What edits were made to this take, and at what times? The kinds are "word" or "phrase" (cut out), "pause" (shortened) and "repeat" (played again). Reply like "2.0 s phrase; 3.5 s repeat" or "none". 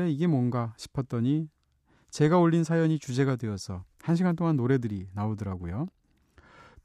none